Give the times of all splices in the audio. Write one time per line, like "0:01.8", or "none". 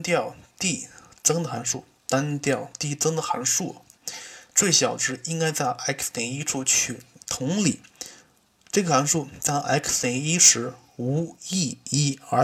none